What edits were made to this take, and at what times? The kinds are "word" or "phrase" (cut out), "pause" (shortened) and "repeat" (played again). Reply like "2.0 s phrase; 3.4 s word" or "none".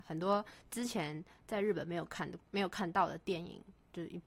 2.4 s pause